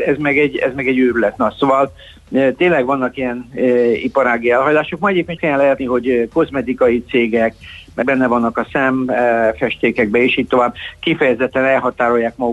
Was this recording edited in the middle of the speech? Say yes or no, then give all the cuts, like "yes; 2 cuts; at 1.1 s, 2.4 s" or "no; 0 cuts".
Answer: yes; 3 cuts; at 5.4 s, 5.8 s, 8.0 s